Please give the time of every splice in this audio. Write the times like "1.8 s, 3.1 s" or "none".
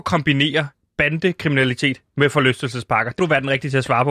3.2 s